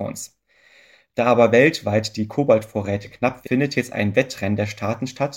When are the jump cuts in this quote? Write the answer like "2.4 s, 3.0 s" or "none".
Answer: 3.4 s

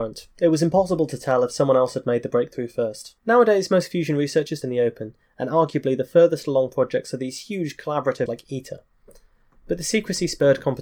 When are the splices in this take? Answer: 3.2 s, 4.6 s, 8.3 s

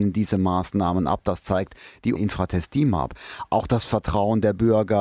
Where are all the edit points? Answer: 2.2 s

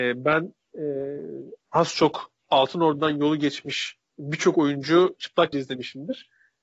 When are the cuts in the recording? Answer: 1.6 s, 2.4 s, 4.1 s, 5.5 s

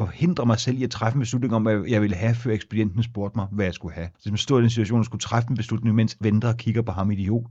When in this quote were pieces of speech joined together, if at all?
4.1 s, 6.2 s

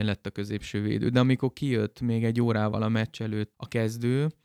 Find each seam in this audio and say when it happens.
3.5 s

